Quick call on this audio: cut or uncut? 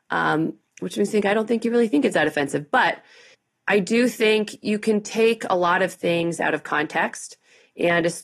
cut